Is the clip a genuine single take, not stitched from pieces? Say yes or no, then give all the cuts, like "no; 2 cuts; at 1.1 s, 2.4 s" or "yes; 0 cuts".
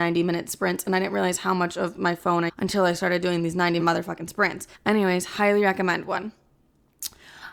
no; 3 cuts; at 2.5 s, 3.8 s, 4.7 s